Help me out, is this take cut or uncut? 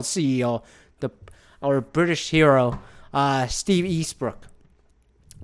uncut